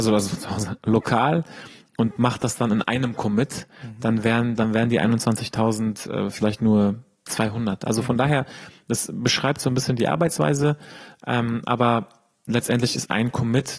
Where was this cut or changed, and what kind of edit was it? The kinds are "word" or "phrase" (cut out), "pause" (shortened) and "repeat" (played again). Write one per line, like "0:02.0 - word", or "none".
none